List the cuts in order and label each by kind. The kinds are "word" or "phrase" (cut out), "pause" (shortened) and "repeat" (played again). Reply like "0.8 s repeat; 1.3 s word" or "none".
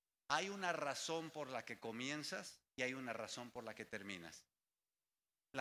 2.7 s pause